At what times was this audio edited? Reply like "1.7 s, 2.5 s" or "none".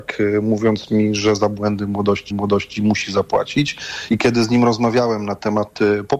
2.3 s